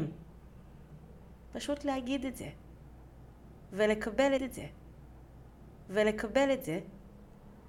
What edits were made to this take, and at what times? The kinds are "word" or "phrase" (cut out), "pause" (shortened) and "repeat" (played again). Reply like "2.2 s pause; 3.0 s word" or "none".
4.4 s repeat